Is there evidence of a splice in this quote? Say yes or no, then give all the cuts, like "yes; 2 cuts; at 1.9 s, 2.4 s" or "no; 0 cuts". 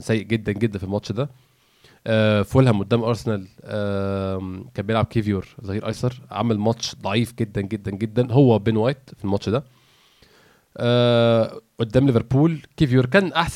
no; 0 cuts